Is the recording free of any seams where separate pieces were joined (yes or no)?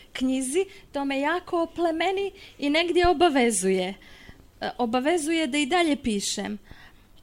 yes